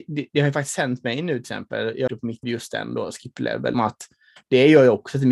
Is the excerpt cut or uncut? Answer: cut